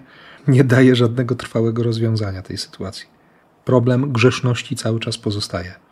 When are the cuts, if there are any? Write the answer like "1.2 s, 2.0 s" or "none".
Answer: none